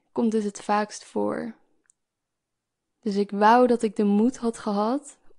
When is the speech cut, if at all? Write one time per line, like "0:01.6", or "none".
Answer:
none